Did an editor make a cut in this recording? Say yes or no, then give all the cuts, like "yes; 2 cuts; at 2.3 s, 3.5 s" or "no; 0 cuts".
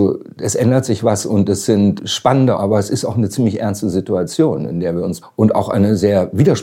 yes; 2 cuts; at 2.5 s, 5.2 s